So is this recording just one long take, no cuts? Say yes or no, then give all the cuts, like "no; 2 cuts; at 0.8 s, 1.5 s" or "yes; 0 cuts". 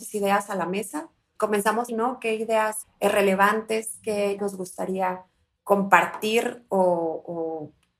no; 4 cuts; at 1.4 s, 1.9 s, 2.8 s, 4.4 s